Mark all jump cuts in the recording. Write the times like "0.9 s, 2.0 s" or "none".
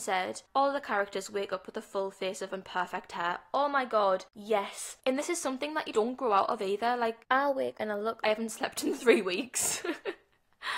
2.5 s, 5.9 s, 7.7 s, 8.2 s